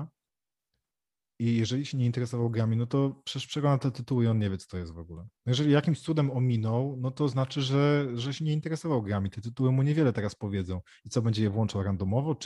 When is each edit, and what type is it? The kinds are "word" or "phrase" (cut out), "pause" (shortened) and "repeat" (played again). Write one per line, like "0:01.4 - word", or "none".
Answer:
0:05.4 - pause